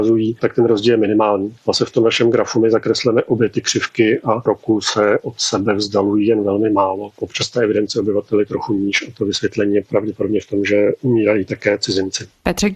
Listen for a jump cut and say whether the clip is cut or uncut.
cut